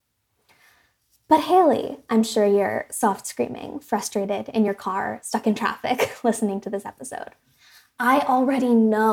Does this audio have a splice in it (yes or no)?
no